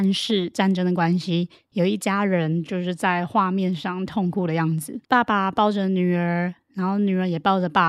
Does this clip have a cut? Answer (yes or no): yes